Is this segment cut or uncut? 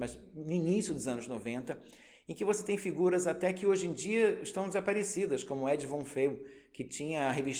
uncut